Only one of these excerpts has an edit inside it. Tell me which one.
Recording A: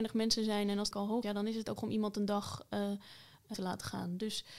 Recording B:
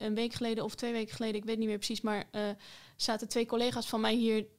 A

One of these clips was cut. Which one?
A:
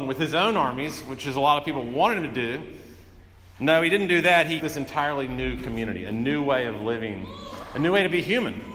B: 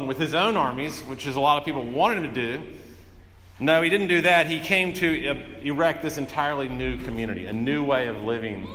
A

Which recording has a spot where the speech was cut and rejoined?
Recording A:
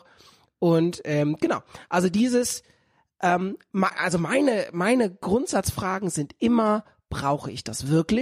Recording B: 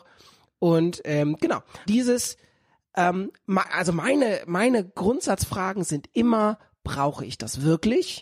B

